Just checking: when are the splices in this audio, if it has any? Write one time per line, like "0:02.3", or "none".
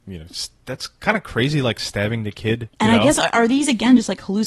0:02.7